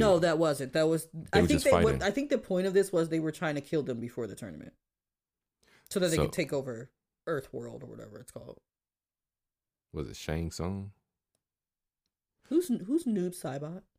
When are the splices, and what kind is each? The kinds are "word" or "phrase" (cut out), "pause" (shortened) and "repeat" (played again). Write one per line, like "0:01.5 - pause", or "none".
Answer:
none

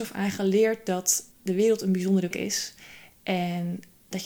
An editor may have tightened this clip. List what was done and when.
0:01.3 - pause
0:02.3 - word

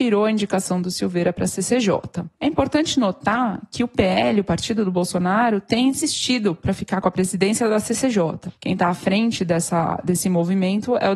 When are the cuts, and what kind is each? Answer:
none

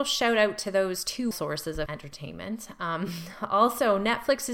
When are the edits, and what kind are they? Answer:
0:01.3 - word
0:01.9 - word

